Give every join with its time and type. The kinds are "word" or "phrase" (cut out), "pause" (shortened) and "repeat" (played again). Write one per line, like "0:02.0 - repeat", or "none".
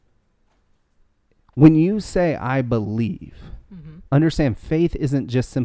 0:04.1 - pause